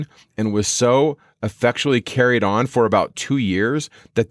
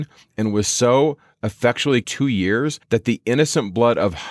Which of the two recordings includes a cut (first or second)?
second